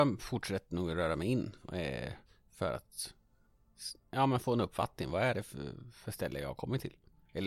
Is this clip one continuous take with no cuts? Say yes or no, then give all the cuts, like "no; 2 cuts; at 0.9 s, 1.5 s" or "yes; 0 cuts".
yes; 0 cuts